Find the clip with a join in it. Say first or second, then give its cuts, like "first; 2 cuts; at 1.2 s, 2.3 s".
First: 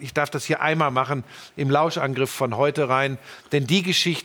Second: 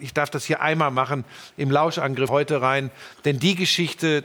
second; 1 cut; at 2.3 s